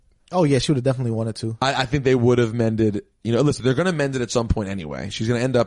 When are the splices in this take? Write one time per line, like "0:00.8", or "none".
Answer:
none